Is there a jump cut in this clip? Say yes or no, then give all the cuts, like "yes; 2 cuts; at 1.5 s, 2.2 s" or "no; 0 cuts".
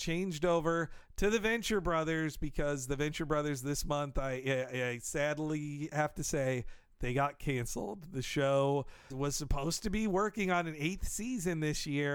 yes; 1 cut; at 9.1 s